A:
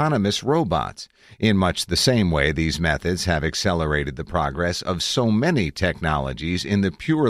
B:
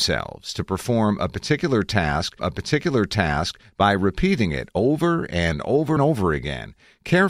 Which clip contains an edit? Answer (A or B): B